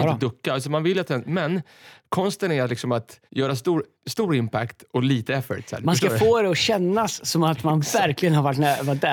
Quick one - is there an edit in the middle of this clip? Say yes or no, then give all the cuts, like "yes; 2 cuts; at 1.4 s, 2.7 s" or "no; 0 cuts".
yes; 1 cut; at 3.3 s